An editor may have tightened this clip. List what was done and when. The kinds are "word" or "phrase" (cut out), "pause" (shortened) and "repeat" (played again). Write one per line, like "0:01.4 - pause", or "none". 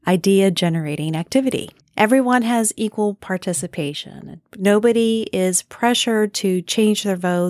0:01.8 - pause